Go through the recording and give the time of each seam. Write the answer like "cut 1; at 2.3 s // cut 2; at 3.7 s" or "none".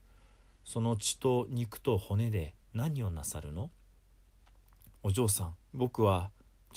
cut 1; at 2.6 s // cut 2; at 5.0 s // cut 3; at 5.6 s